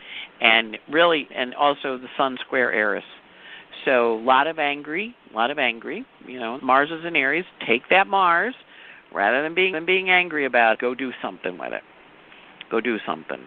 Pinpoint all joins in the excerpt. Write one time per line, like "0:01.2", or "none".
0:01.3
0:05.2
0:06.6
0:09.7
0:10.7

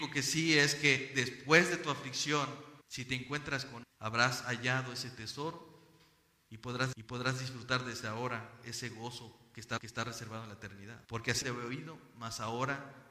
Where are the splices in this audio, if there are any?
0:02.8
0:03.8
0:06.9
0:09.8
0:11.0
0:11.4

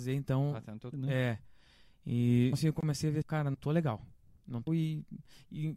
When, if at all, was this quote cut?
0:00.9
0:02.5
0:03.2
0:03.5
0:04.7

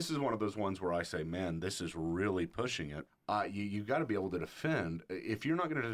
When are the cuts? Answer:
0:03.1

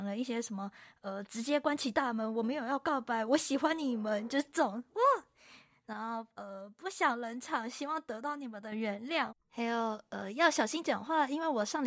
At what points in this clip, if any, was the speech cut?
0:09.4

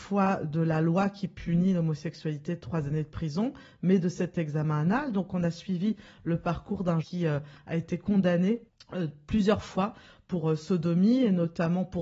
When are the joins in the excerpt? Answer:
0:07.0
0:08.7

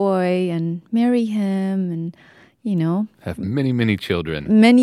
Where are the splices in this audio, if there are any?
none

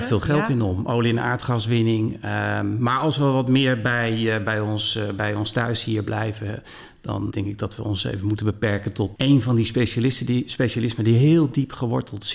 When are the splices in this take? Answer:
0:07.3

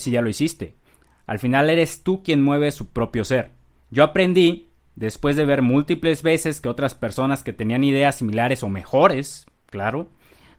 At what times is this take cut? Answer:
0:03.8

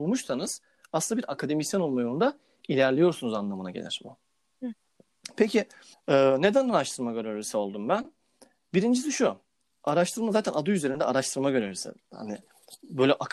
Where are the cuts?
0:05.9

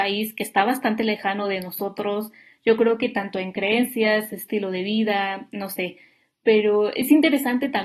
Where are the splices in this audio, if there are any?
none

